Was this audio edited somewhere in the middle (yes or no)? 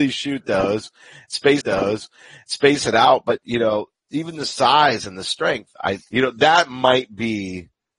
yes